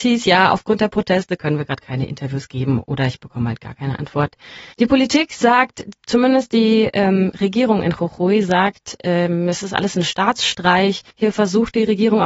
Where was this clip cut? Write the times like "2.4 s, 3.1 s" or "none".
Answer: 4.7 s, 11.1 s